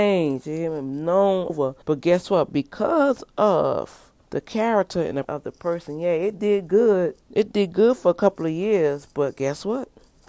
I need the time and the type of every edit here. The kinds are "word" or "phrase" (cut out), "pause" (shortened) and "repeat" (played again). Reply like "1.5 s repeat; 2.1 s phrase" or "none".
1.5 s word; 1.8 s pause; 4.2 s pause; 5.2 s word; 7.2 s pause

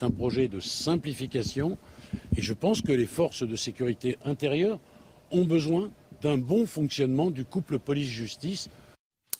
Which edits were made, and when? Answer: none

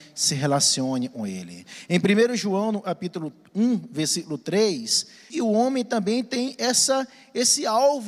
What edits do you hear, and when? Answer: 5.3 s word

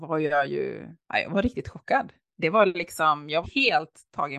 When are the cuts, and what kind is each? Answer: 1.0 s pause; 3.4 s phrase

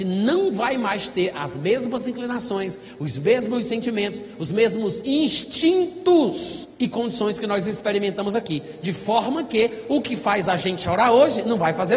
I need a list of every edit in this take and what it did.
6.7 s pause

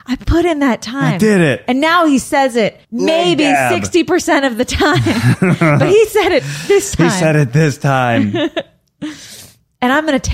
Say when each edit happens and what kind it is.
2.8 s pause

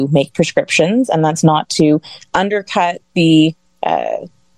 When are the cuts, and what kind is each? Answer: 3.0 s pause

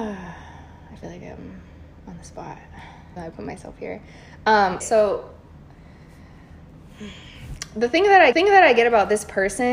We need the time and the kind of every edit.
3.2 s word; 4.8 s word; 8.3 s repeat

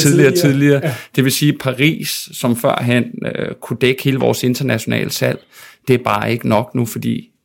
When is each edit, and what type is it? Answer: none

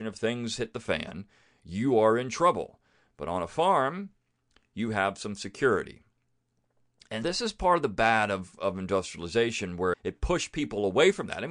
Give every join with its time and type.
7.2 s word; 9.9 s word

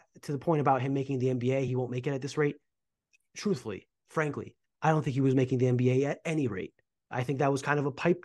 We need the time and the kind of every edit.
none

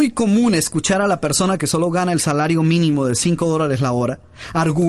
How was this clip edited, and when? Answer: none

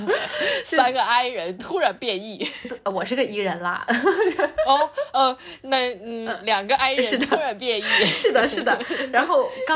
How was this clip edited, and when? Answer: none

